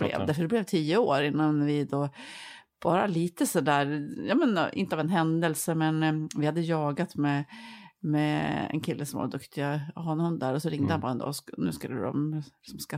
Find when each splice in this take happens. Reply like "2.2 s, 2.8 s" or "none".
none